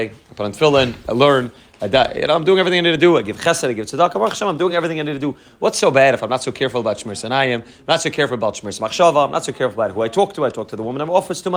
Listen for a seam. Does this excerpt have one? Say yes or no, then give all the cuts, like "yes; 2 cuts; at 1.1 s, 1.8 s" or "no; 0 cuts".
no; 0 cuts